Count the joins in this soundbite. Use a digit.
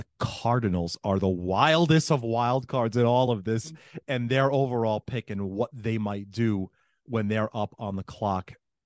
0